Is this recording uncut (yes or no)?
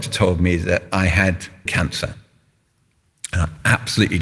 no